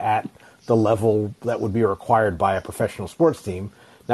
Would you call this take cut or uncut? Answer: uncut